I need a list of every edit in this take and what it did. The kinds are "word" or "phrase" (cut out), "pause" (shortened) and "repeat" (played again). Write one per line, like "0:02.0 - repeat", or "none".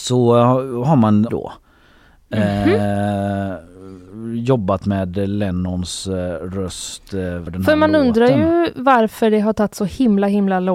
0:01.3 - phrase
0:07.5 - word